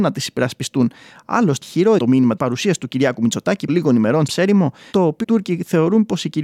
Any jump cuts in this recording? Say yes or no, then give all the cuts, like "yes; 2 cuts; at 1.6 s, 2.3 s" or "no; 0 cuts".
yes; 7 cuts; at 1.6 s, 2.0 s, 2.4 s, 3.7 s, 4.3 s, 4.9 s, 5.2 s